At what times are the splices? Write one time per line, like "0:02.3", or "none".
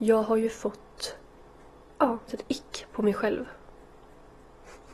0:02.3